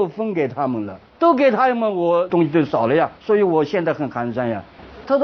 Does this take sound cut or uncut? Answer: cut